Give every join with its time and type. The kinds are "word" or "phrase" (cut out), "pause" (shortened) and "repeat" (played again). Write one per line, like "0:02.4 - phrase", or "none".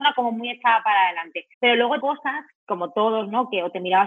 0:01.5 - pause
0:02.0 - word
0:02.5 - pause